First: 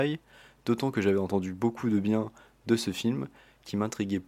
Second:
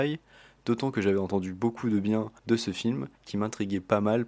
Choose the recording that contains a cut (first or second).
second